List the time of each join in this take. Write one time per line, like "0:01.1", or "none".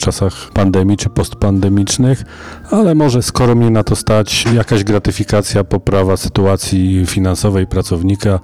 none